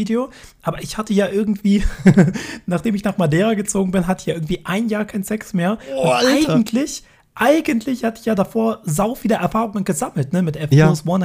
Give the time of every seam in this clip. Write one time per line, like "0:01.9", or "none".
none